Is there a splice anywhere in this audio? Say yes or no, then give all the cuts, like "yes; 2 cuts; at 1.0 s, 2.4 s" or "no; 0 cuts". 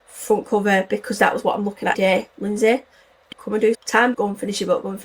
yes; 4 cuts; at 1.9 s, 3.3 s, 3.7 s, 4.1 s